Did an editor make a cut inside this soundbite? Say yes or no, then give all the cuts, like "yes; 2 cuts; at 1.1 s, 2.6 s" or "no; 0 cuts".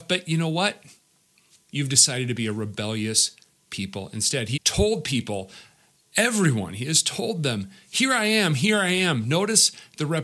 yes; 1 cut; at 4.6 s